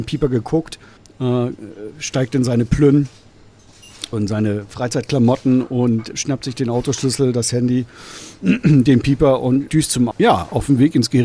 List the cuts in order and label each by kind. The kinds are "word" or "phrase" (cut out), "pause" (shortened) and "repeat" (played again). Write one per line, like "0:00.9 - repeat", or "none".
0:01.0 - pause
0:04.1 - word
0:06.1 - word
0:09.7 - word
0:10.1 - phrase